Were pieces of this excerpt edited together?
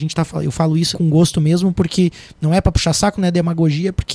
yes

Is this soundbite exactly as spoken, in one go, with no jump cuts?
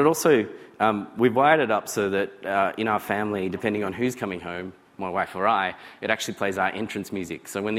yes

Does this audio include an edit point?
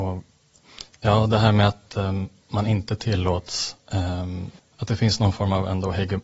yes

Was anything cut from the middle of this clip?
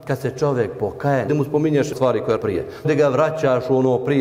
yes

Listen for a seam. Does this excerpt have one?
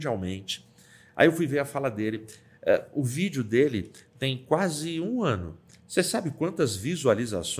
no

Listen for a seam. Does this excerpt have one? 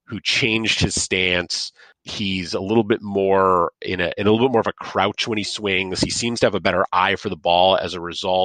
no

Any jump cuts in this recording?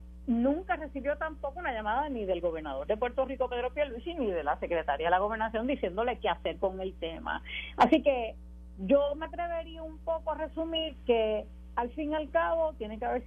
no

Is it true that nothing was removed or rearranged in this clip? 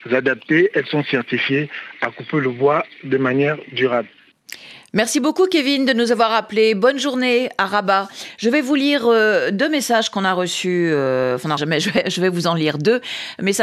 no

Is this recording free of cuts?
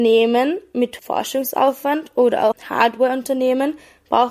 no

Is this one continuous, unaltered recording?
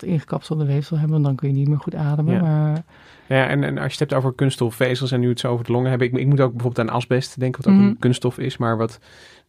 yes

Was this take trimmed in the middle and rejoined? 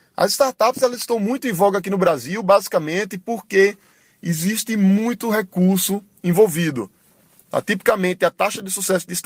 no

